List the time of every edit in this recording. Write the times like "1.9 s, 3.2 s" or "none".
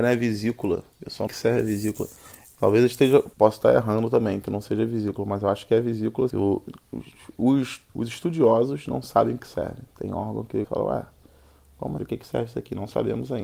0.9 s, 1.3 s, 3.3 s, 6.3 s, 7.9 s, 9.4 s, 10.6 s, 12.0 s